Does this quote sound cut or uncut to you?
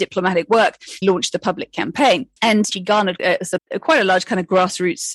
cut